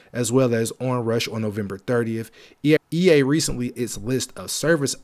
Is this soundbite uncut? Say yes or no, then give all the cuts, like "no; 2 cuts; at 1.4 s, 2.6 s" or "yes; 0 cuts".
no; 2 cuts; at 2.8 s, 3.8 s